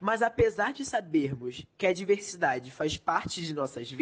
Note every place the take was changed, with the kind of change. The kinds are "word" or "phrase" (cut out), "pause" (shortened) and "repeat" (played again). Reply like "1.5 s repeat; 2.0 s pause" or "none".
none